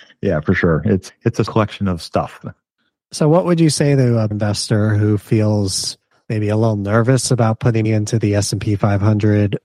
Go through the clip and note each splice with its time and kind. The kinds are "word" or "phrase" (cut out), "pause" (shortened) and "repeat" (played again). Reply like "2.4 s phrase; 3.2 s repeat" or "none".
1.1 s word; 1.5 s word; 4.3 s word; 7.8 s word